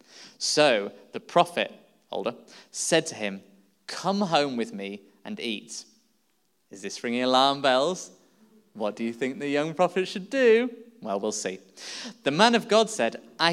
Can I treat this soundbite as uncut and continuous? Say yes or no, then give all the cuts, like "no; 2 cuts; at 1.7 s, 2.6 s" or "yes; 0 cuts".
yes; 0 cuts